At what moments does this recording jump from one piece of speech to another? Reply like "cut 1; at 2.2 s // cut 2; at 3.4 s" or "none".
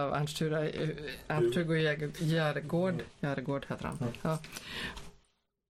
none